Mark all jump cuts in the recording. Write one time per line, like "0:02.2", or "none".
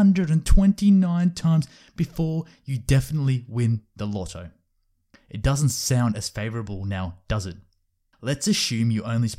none